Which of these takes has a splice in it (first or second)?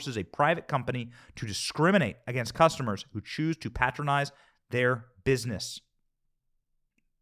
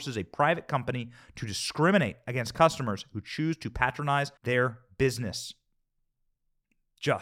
second